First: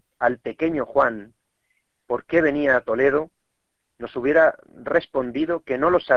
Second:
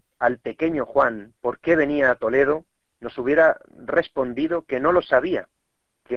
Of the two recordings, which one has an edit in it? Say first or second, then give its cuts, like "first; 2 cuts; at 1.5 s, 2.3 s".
second; 2 cuts; at 1.4 s, 2.8 s